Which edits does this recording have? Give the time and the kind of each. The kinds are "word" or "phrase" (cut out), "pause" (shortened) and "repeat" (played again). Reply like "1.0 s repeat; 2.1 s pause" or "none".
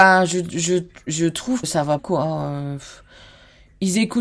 1.6 s word; 2.0 s word